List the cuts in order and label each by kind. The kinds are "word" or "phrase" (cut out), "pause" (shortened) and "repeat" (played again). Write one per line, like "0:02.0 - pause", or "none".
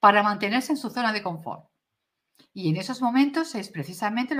none

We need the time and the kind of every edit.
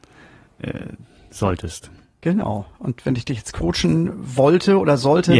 none

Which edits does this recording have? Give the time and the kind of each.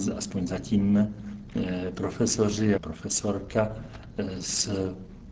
0:02.8 - word

